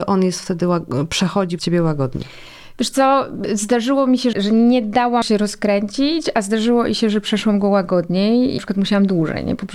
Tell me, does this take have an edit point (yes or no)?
yes